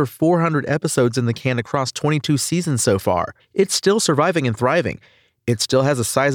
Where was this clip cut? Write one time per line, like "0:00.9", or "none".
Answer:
0:03.4